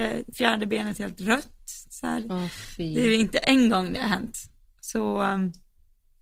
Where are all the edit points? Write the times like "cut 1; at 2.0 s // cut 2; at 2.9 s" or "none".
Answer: none